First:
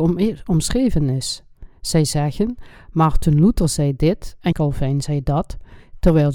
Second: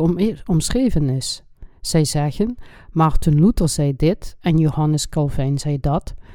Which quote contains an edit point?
first; 1 cut; at 4.5 s

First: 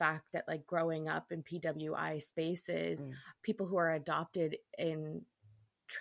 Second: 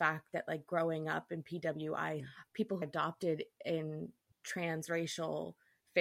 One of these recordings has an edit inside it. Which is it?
second; 3 cuts; at 2.2 s, 2.8 s, 4.3 s

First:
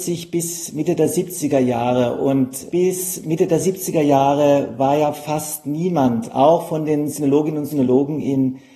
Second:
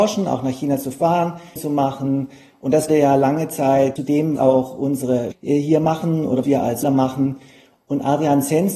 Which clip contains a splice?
second; 7 cuts; at 1.6 s, 2.9 s, 4.0 s, 4.4 s, 5.3 s, 6.4 s, 6.8 s

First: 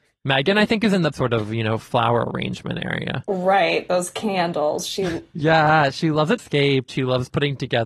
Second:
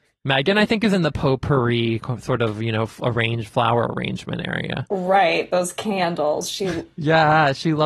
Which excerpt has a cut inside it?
first; 4 cuts; at 1.1 s, 1.9 s, 6.4 s, 6.9 s

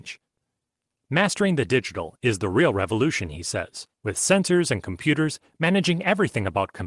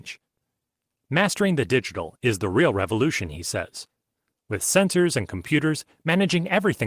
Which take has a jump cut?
first; 1 cut; at 3.9 s

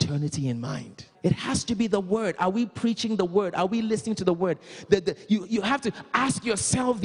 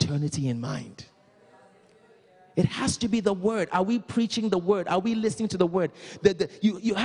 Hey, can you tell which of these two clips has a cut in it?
first; 1 cut; at 1.1 s

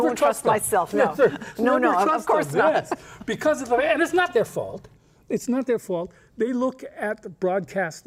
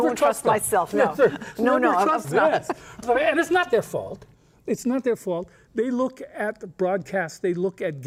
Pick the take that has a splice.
second; 2 cuts; at 2.2 s, 3.0 s

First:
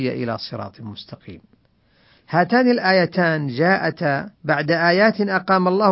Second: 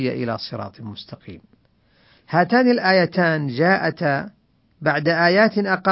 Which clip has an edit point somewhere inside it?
first; 1 cut; at 4.4 s

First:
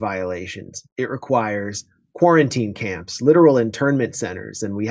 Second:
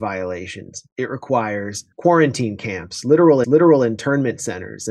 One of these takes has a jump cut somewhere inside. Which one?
second; 2 cuts; at 1.9 s, 3.4 s

